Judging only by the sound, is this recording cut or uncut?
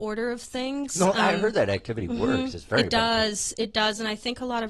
uncut